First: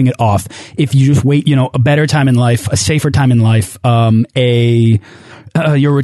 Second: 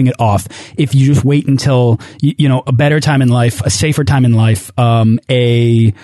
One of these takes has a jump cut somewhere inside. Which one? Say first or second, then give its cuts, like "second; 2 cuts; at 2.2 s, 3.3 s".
first; 1 cut; at 1.4 s